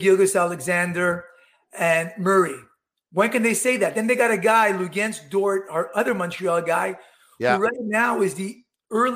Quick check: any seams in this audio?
no; 0 cuts

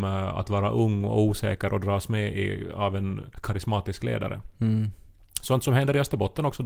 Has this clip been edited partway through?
no; 0 cuts

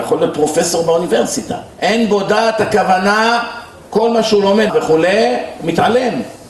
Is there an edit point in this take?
yes; 2 cuts; at 1.7 s, 4.7 s

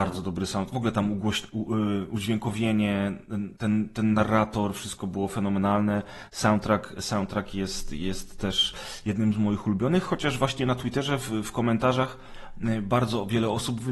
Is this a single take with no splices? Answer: yes; 0 cuts

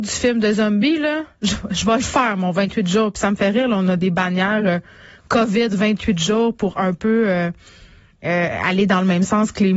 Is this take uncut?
yes; 0 cuts

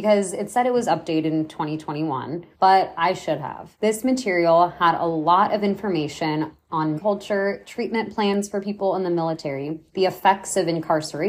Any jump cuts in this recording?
yes; 4 cuts; at 2.5 s, 3.7 s, 7.0 s, 9.9 s

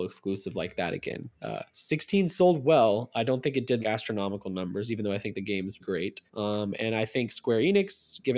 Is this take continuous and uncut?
no; 3 cuts; at 3.8 s, 5.8 s, 6.3 s

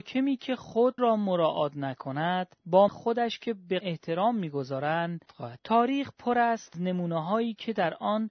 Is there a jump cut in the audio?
yes; 6 cuts; at 1.0 s, 2.9 s, 3.8 s, 5.3 s, 5.6 s, 6.7 s

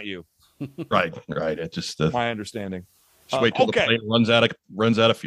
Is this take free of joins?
yes; 0 cuts

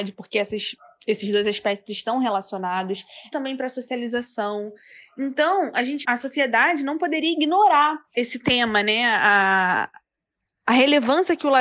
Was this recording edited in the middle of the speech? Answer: yes; 3 cuts; at 3.3 s, 6.0 s, 8.1 s

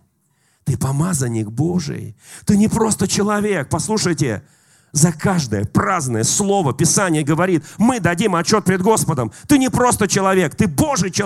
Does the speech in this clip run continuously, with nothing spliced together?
yes; 0 cuts

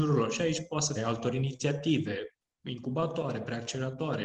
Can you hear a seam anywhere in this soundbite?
yes; 1 cut; at 1.0 s

